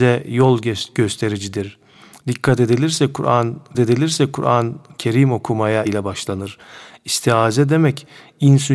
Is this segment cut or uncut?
cut